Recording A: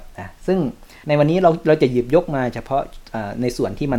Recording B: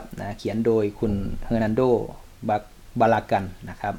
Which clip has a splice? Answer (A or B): A